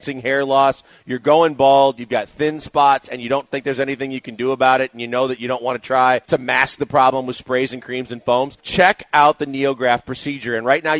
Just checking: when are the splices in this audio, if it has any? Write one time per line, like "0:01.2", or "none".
0:06.2
0:08.6